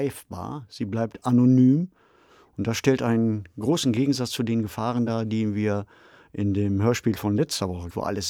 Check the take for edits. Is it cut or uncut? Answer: uncut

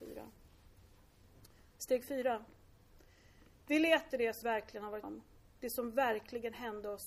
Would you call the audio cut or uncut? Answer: cut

